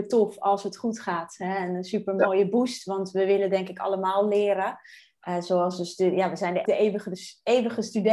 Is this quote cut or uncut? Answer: cut